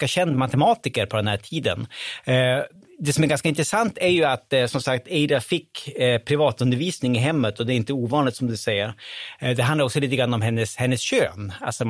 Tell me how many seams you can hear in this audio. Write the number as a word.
zero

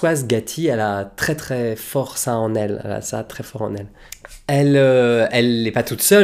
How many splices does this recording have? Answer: zero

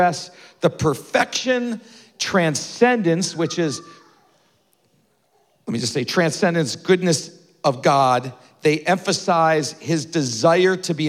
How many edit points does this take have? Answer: zero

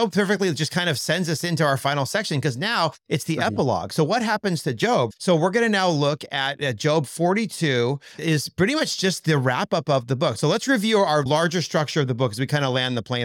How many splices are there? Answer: one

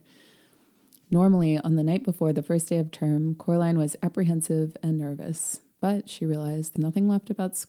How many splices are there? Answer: two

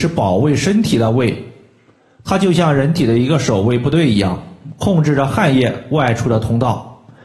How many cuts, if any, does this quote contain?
zero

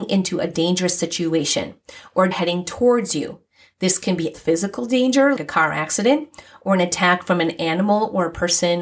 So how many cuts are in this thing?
three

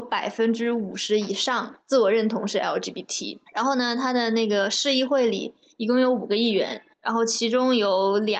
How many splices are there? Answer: three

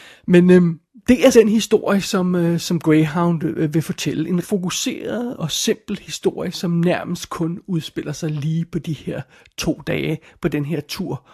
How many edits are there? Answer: three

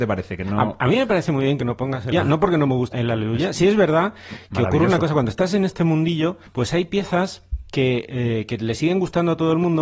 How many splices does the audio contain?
four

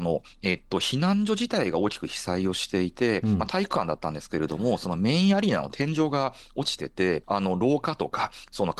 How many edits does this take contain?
one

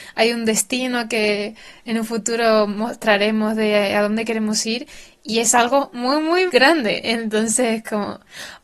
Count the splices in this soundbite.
one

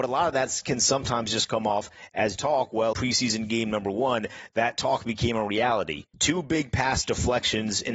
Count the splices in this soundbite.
three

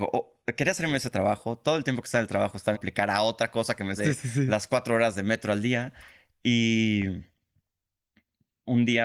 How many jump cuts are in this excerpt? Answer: two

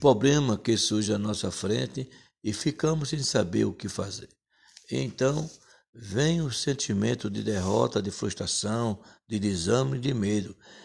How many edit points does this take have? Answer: zero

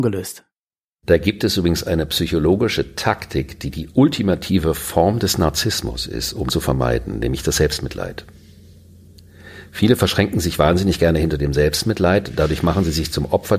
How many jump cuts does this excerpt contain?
one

